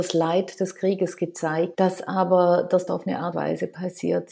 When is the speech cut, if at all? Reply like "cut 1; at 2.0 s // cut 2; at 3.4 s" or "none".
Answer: cut 1; at 1.7 s // cut 2; at 2.9 s // cut 3; at 3.3 s

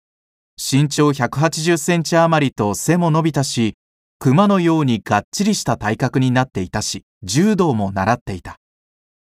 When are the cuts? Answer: cut 1; at 7.1 s

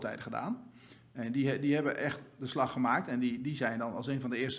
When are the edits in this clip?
none

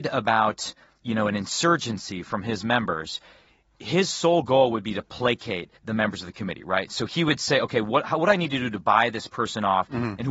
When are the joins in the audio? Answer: cut 1; at 5.8 s

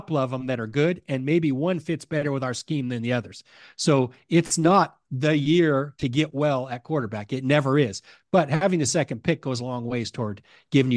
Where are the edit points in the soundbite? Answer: none

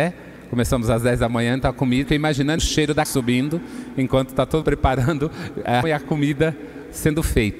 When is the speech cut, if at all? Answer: cut 1; at 2.0 s // cut 2; at 2.6 s // cut 3; at 3.1 s // cut 4; at 4.6 s // cut 5; at 5.8 s

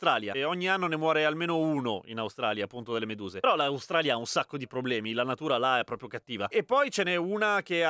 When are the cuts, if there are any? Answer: none

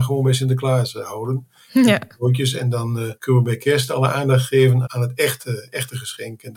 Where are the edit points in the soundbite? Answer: cut 1; at 3.2 s // cut 2; at 4.8 s

